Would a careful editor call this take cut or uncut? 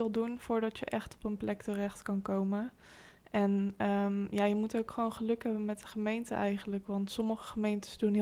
uncut